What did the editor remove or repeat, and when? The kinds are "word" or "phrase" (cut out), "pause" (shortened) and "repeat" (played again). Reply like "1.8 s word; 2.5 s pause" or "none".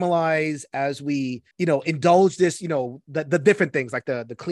1.5 s pause